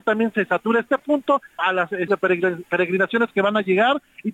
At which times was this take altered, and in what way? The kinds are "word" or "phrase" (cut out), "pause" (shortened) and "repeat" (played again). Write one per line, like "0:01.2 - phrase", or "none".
0:01.6 - word
0:02.1 - word